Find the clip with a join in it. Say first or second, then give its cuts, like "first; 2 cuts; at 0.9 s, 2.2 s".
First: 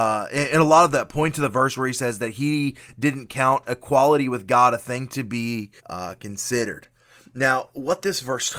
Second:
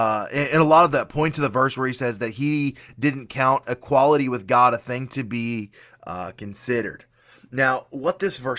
first; 1 cut; at 5.8 s